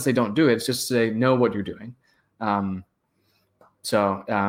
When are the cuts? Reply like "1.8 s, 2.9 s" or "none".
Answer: none